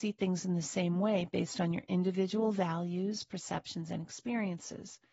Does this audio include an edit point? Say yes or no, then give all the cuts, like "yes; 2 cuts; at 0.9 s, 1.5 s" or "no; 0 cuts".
no; 0 cuts